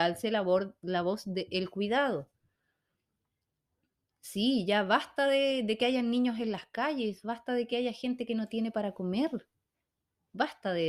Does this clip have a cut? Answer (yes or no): no